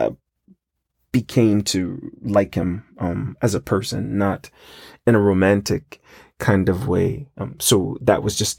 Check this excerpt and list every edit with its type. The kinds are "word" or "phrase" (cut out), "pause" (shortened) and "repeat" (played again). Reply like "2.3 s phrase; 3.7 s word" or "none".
none